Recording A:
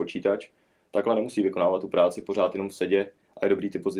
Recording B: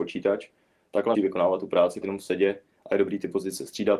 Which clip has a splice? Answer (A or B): B